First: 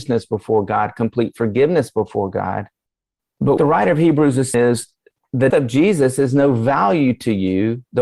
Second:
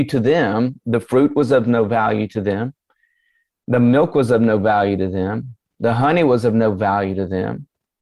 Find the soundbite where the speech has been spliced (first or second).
first